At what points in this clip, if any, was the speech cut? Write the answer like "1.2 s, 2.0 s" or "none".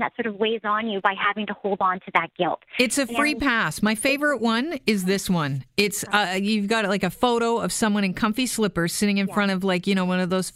none